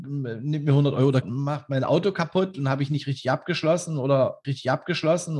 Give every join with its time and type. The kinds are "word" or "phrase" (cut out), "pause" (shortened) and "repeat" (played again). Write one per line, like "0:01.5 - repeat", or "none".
0:01.2 - word
0:04.4 - repeat